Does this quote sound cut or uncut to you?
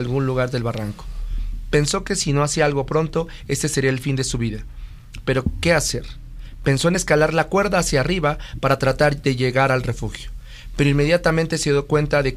uncut